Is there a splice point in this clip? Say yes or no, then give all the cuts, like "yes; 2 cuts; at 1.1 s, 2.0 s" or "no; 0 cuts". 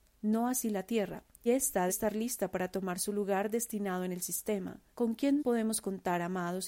yes; 4 cuts; at 1.5 s, 1.9 s, 4.9 s, 5.4 s